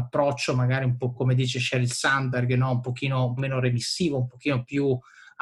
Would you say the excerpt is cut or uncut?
cut